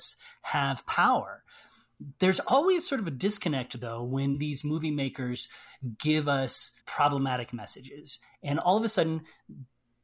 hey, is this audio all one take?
no; 1 cut; at 6.8 s

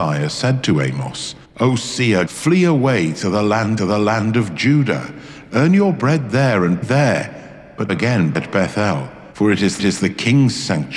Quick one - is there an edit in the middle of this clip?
yes; 8 cuts; at 1.4 s, 2.3 s, 3.8 s, 6.8 s, 7.9 s, 8.3 s, 9.3 s, 9.8 s

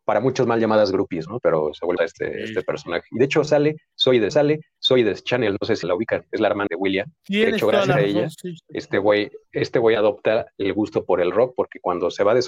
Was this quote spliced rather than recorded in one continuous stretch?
yes; 5 cuts; at 2.0 s, 4.3 s, 5.8 s, 6.7 s, 7.2 s

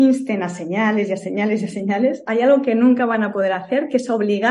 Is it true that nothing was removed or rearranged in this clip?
yes; 0 cuts

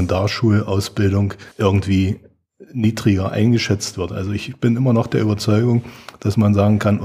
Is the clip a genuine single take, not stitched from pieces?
no; 1 cut; at 1.5 s

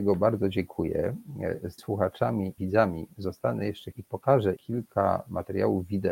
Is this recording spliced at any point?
yes; 4 cuts; at 1.8 s, 2.6 s, 3.9 s, 4.6 s

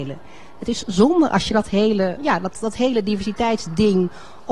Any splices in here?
yes; 1 cut; at 2.2 s

